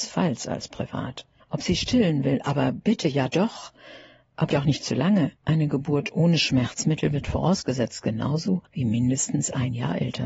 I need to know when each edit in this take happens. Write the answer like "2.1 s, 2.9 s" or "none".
1.4 s, 4.5 s, 5.4 s, 8.7 s